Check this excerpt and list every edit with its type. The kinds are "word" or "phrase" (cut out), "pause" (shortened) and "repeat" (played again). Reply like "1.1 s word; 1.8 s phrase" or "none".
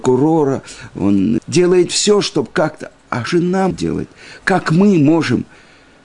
1.4 s word; 3.3 s word; 3.7 s word

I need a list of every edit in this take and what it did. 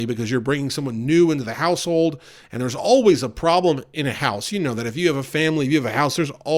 none

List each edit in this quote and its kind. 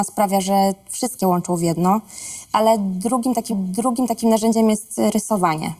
1.2 s phrase; 3.5 s repeat

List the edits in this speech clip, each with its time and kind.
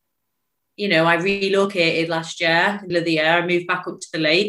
2.9 s word

